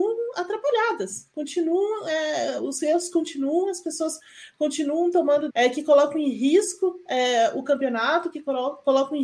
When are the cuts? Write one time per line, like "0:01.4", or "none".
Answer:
0:05.5